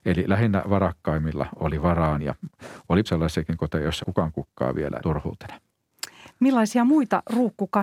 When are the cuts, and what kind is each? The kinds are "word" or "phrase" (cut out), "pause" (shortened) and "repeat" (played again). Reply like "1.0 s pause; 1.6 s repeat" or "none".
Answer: 2.2 s word; 3.1 s word; 4.0 s word; 5.0 s phrase